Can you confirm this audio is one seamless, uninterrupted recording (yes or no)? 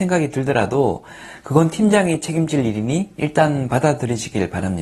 yes